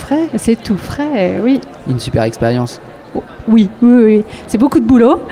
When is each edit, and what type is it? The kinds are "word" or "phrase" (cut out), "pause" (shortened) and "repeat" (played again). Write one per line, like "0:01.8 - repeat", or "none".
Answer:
none